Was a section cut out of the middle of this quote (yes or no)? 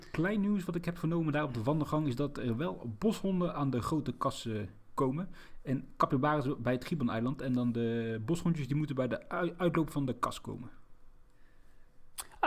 no